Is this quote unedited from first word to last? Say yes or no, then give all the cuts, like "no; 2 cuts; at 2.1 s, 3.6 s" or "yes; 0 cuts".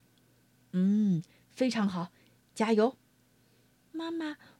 yes; 0 cuts